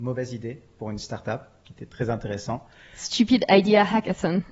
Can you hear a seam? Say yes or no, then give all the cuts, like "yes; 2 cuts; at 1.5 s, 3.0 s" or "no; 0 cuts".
no; 0 cuts